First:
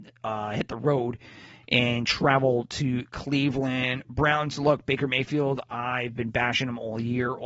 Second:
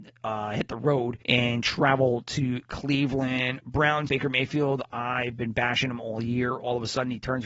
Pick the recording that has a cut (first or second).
second